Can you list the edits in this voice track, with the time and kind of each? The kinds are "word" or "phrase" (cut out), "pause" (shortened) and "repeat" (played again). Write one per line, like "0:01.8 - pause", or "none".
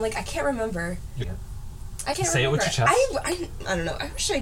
0:01.2 - word
0:02.1 - word